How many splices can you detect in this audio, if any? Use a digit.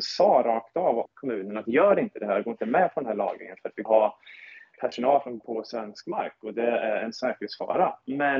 4